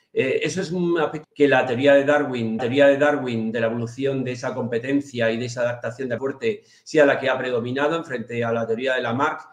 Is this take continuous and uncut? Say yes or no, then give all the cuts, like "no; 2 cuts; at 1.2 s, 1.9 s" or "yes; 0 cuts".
no; 3 cuts; at 1.2 s, 2.6 s, 6.2 s